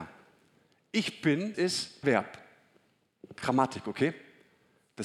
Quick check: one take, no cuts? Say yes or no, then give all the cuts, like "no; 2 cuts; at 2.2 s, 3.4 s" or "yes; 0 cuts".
no; 2 cuts; at 1.5 s, 2.0 s